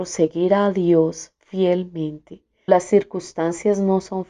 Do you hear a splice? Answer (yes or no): yes